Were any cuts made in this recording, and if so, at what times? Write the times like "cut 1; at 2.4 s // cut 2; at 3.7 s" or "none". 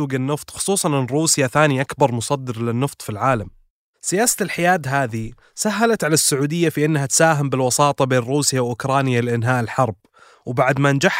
none